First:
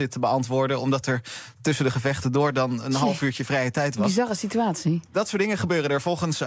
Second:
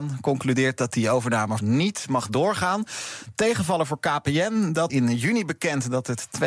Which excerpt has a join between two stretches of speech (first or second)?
second